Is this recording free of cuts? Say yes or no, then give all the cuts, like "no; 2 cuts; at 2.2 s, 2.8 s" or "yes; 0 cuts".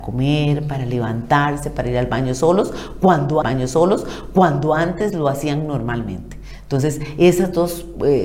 no; 1 cut; at 3.4 s